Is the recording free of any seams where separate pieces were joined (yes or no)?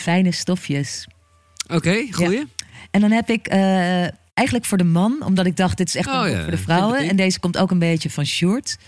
yes